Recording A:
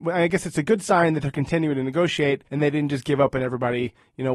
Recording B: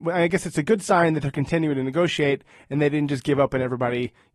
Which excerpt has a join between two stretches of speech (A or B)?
A